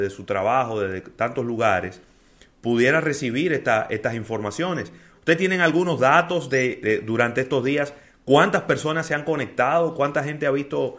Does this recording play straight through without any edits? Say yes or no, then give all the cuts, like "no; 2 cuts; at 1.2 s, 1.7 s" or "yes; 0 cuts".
no; 1 cut; at 6.8 s